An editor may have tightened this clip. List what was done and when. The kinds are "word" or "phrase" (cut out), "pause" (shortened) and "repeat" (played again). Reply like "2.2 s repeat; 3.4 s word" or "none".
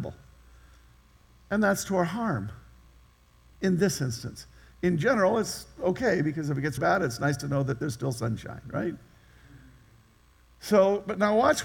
6.8 s word